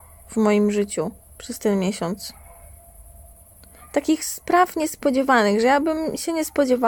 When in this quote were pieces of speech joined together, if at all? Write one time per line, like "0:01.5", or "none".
none